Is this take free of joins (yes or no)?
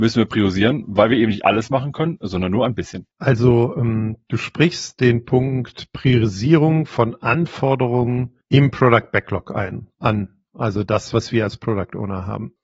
no